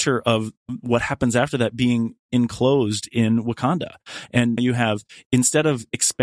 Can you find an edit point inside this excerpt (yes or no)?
yes